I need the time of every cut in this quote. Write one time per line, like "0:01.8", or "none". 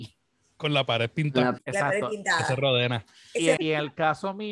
0:01.6
0:03.6